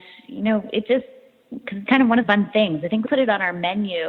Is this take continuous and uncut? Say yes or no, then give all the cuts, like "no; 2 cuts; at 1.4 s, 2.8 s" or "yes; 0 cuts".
no; 3 cuts; at 1.9 s, 2.2 s, 3.0 s